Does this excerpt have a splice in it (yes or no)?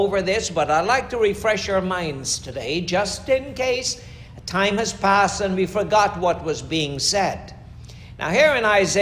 no